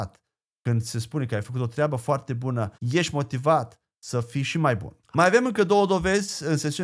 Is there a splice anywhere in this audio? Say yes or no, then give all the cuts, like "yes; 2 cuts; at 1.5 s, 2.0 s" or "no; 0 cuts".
yes; 2 cuts; at 2.8 s, 5.0 s